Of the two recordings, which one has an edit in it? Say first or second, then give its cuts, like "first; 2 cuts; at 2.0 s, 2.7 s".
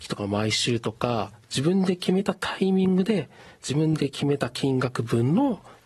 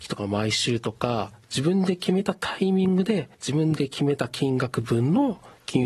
second; 1 cut; at 3.3 s